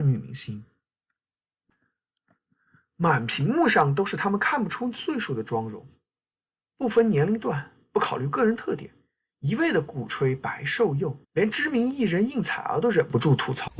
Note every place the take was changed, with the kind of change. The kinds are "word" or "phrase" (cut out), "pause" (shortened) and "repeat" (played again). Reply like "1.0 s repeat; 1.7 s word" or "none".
11.2 s pause